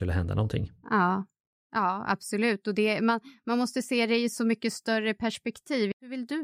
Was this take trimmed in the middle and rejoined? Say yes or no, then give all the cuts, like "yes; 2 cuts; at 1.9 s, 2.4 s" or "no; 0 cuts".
no; 0 cuts